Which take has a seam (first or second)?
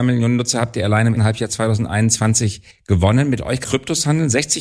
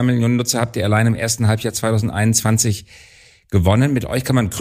first